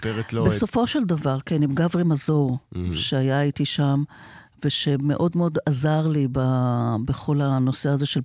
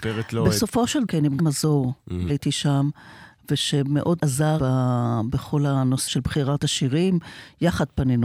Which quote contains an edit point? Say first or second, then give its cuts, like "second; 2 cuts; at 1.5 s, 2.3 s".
second; 6 cuts; at 1.1 s, 1.4 s, 2.3 s, 4.2 s, 4.6 s, 6.1 s